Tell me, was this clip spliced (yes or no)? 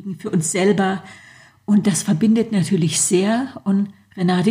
no